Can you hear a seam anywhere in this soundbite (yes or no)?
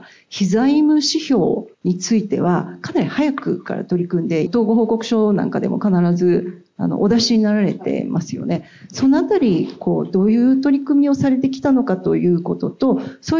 yes